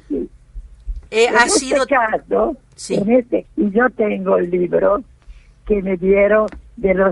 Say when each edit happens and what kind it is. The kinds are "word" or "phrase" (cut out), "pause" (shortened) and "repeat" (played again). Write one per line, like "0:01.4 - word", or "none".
0:01.1 - pause
0:03.4 - word